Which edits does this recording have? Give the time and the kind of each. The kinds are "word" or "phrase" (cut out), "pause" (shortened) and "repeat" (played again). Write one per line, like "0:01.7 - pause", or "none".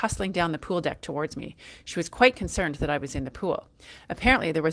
none